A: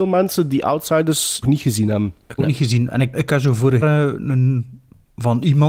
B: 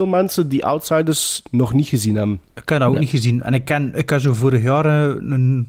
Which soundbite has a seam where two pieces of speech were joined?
A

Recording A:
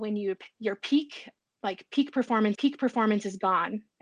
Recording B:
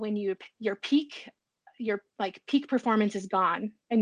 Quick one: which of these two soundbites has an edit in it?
A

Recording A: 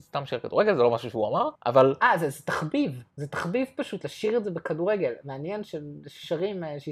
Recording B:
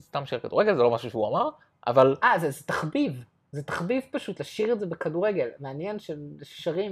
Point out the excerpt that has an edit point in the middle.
A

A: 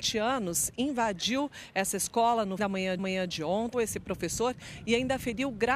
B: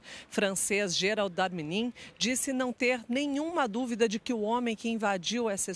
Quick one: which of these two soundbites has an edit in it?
A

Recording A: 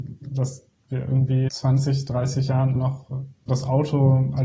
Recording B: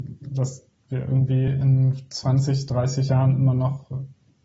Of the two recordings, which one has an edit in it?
A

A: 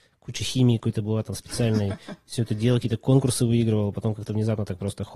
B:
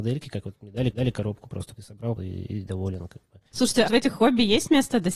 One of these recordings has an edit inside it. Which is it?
B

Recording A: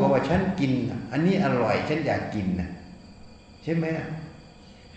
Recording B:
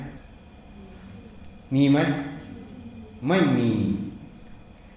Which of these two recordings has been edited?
A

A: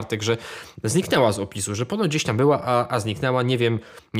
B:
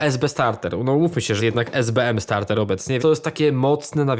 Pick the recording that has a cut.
B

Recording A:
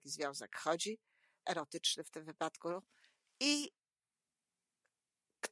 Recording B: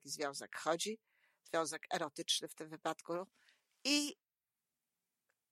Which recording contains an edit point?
A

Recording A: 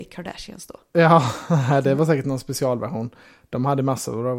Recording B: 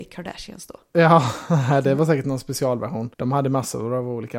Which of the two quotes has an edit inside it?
B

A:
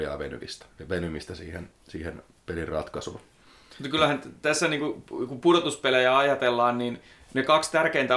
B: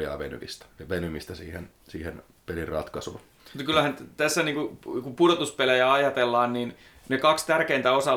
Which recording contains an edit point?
B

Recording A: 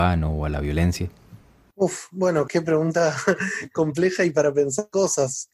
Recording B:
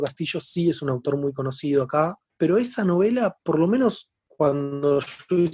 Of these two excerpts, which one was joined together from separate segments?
B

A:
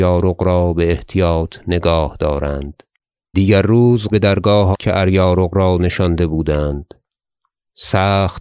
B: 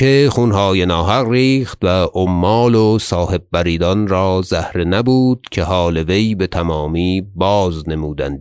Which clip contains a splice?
A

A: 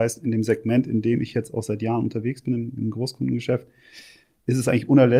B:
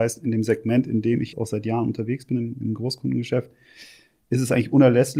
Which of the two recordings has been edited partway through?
B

